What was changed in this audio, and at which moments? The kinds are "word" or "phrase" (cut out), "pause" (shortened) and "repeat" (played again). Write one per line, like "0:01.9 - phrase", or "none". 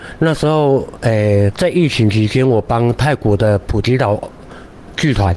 0:01.5 - word